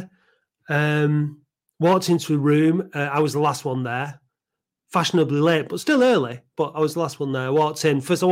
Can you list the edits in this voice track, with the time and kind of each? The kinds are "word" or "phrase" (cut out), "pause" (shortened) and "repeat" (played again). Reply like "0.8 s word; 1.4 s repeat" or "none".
none